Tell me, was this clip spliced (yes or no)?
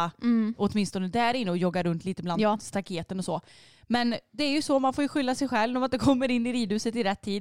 no